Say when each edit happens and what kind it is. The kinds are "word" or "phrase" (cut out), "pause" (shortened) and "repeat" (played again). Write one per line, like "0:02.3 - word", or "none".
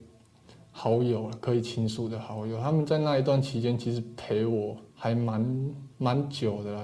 0:04.9 - pause
0:05.9 - pause